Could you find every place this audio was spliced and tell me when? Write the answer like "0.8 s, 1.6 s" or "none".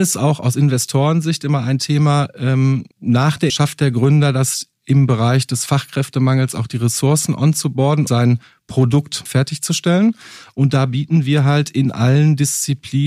2.9 s, 3.5 s, 8.1 s, 9.3 s